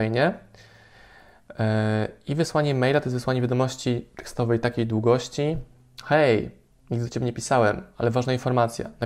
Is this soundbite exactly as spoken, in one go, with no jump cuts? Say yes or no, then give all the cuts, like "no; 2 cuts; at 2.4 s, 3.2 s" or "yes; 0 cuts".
yes; 0 cuts